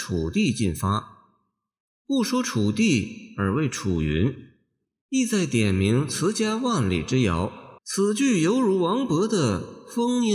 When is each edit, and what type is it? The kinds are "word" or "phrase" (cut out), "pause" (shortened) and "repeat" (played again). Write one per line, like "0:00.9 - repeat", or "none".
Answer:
0:07.8 - pause